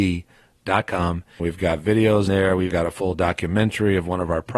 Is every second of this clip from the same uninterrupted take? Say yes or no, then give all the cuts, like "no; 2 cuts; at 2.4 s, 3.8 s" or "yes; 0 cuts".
no; 3 cuts; at 1.4 s, 2.3 s, 2.7 s